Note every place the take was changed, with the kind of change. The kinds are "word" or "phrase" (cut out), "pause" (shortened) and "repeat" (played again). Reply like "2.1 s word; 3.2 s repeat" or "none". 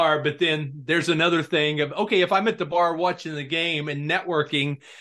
none